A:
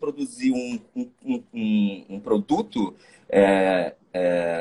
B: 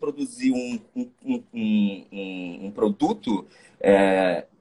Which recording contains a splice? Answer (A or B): A